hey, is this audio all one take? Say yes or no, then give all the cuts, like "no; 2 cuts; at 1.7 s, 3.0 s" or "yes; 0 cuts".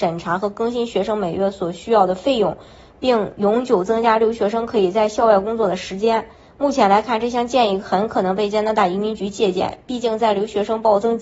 yes; 0 cuts